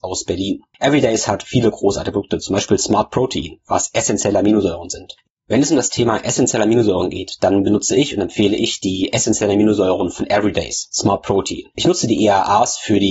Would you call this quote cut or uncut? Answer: uncut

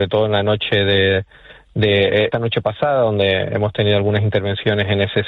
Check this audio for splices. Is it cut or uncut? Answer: cut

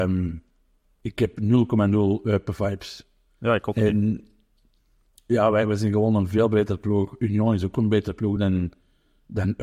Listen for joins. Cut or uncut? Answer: uncut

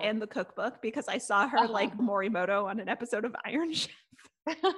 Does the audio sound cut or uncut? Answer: cut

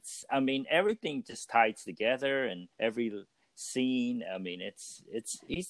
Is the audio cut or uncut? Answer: cut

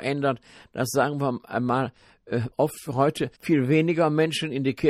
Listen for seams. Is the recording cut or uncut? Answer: cut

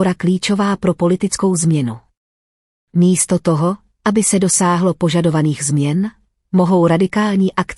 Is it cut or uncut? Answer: uncut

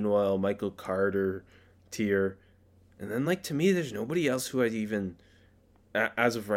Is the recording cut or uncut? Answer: uncut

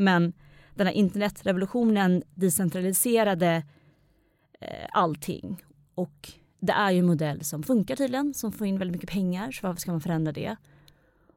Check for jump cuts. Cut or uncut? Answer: uncut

